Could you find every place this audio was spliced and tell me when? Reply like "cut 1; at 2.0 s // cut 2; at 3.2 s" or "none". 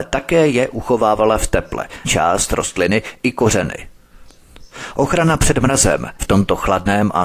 cut 1; at 2.0 s // cut 2; at 6.2 s